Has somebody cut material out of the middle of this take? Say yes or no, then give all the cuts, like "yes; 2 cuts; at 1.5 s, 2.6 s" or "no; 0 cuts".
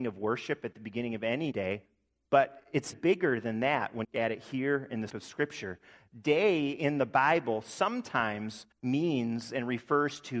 yes; 5 cuts; at 1.5 s, 2.9 s, 4.0 s, 5.1 s, 8.7 s